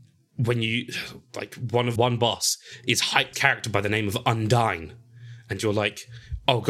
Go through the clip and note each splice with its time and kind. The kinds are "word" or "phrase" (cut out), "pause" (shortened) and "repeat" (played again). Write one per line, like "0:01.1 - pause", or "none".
0:02.0 - word
0:03.3 - phrase

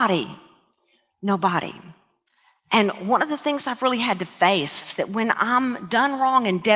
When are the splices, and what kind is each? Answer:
none

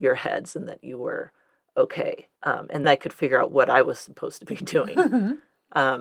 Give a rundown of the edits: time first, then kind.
0:02.4 - pause
0:02.8 - word

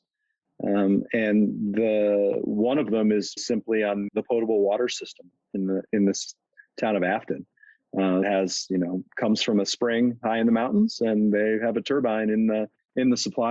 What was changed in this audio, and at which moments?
0:03.4 - word
0:04.1 - word
0:08.2 - word

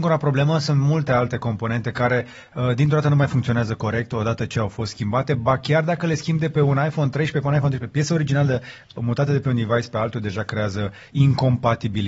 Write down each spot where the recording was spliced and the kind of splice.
none

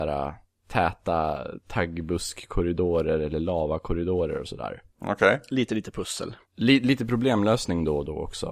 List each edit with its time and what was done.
0:04.9 - pause
0:06.4 - pause

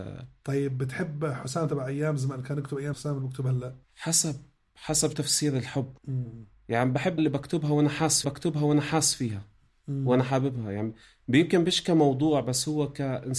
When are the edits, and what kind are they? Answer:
0:02.9 - phrase
0:03.8 - pause
0:05.1 - word
0:06.0 - pause
0:07.2 - phrase
0:08.2 - repeat

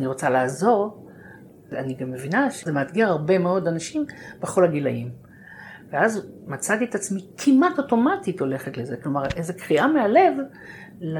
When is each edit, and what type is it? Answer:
none

